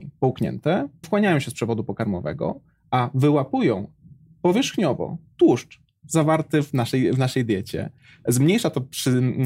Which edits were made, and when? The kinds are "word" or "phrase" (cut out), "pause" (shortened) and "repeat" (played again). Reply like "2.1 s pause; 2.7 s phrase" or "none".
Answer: 1.0 s word